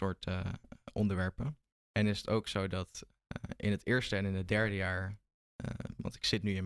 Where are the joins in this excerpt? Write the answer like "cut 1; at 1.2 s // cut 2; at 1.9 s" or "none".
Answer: cut 1; at 1.7 s